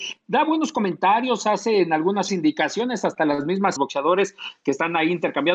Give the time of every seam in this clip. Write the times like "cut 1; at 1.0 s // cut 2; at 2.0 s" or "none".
cut 1; at 2.3 s // cut 2; at 3.8 s